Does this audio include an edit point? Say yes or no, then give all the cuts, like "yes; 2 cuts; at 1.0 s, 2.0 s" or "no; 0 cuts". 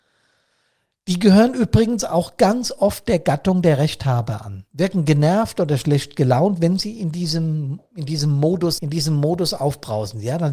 yes; 1 cut; at 8.8 s